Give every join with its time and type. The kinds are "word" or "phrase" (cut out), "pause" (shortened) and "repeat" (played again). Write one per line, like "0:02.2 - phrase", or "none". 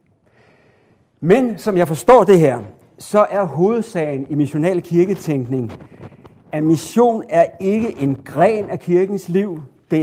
none